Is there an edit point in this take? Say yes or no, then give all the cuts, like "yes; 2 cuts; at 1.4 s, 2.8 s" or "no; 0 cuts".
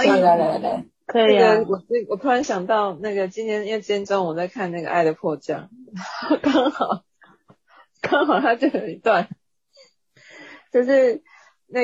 no; 0 cuts